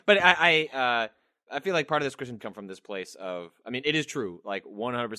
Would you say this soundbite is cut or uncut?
cut